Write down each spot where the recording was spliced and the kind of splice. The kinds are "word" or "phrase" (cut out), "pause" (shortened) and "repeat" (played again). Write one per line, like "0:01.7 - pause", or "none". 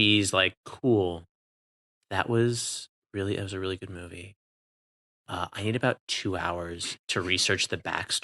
none